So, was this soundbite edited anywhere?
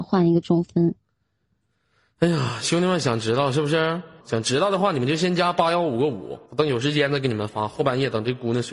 yes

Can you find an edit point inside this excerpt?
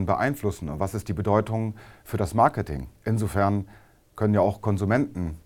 yes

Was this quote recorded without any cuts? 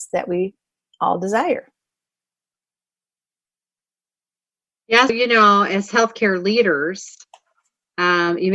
no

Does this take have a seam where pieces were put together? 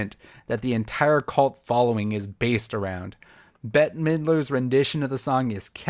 no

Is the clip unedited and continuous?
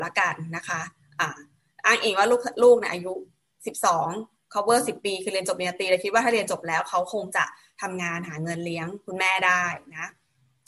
yes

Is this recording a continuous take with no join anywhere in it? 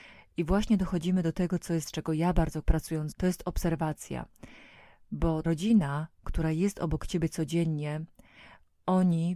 no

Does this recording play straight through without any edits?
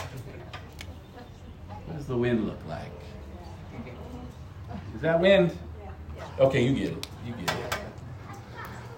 no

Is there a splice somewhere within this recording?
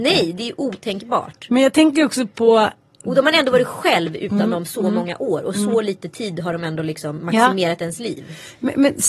no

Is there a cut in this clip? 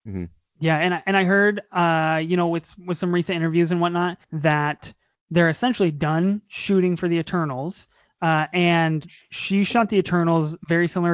yes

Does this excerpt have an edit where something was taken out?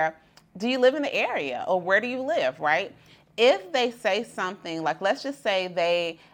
no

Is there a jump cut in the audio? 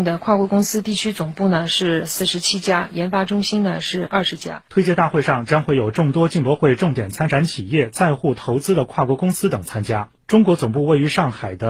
yes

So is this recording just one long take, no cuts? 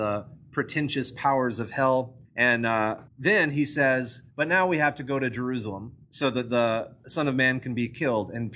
no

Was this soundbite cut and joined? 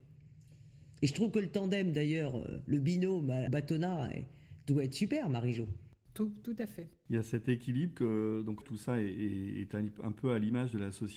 yes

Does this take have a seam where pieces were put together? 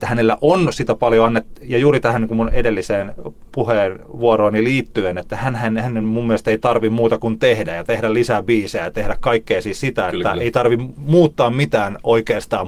no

